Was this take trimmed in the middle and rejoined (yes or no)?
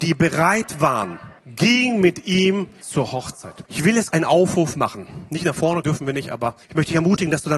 yes